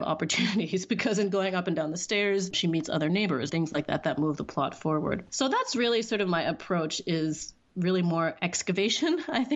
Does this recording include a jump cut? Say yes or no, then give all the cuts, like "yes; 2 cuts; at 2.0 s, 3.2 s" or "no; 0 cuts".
yes; 2 cuts; at 2.5 s, 3.5 s